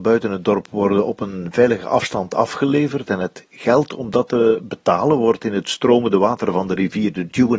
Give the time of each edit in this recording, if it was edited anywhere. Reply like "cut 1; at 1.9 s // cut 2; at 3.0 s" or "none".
none